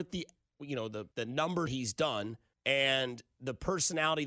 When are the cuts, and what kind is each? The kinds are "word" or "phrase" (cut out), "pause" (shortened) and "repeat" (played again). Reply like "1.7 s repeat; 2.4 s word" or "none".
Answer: 1.1 s pause; 1.7 s word; 2.5 s pause